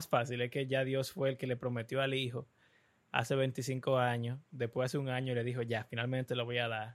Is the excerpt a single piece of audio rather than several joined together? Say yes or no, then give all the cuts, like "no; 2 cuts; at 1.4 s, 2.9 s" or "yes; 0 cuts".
yes; 0 cuts